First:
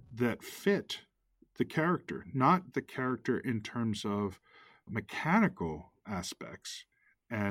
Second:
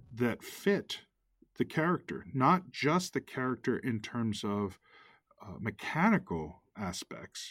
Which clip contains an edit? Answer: first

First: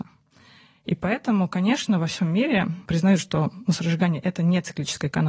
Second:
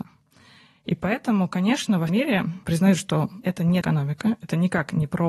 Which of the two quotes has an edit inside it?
second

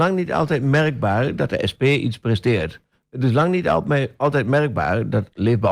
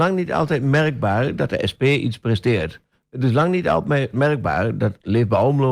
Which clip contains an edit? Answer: second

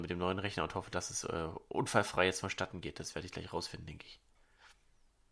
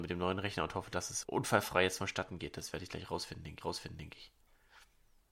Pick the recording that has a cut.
second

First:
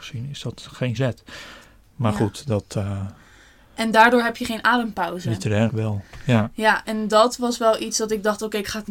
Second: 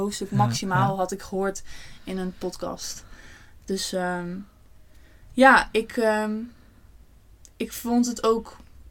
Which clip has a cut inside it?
first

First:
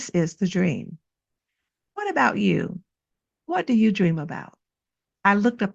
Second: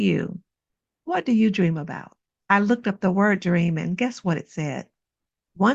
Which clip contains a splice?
second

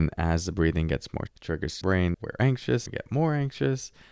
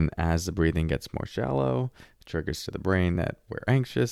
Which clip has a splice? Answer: first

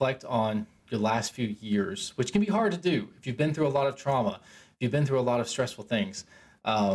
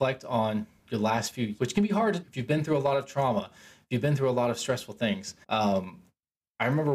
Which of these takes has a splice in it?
second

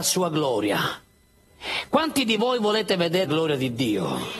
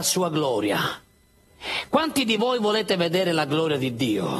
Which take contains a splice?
first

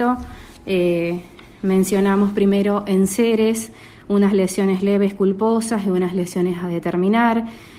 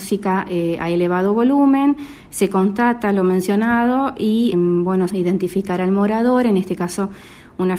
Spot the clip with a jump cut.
second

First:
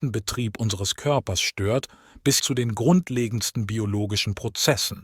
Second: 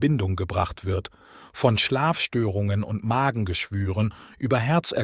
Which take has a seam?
first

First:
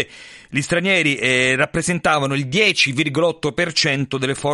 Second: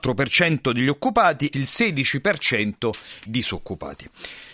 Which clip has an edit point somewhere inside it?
second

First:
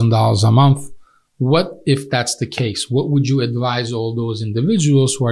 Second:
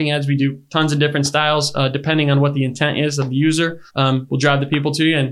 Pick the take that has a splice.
second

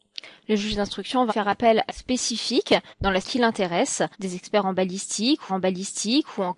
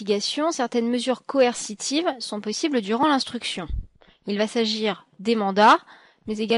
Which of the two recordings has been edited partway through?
first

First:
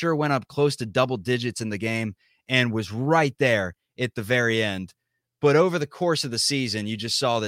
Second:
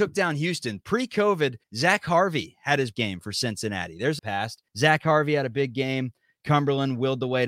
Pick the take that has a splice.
second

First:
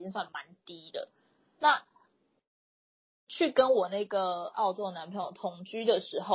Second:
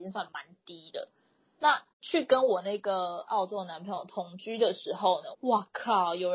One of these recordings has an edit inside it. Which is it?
second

